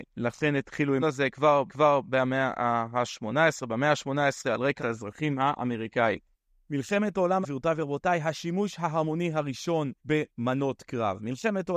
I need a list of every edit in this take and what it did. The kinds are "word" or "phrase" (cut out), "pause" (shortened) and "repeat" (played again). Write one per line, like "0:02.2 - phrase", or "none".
0:01.0 - word
0:01.7 - repeat
0:04.8 - word
0:06.3 - pause
0:07.4 - word
0:10.0 - pause